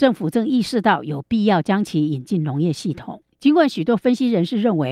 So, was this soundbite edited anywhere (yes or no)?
yes